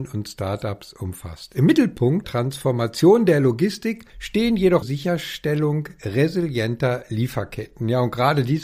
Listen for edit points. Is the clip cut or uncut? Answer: cut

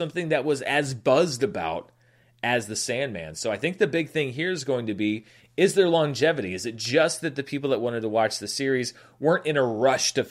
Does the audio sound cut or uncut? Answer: uncut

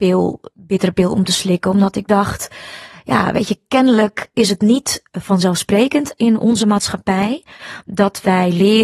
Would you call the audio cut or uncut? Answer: uncut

